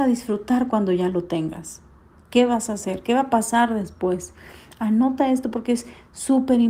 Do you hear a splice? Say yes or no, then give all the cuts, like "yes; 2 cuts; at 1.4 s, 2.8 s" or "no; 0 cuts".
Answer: no; 0 cuts